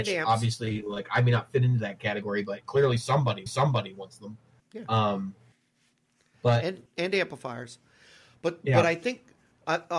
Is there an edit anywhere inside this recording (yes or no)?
yes